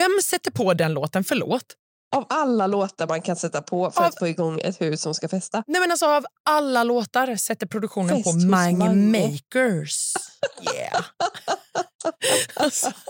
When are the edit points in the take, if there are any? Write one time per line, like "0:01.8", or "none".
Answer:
none